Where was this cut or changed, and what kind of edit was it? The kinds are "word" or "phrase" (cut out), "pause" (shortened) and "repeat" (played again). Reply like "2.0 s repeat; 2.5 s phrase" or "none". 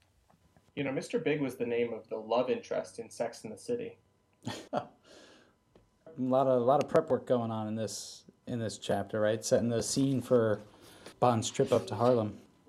4.0 s pause; 4.7 s pause; 11.1 s pause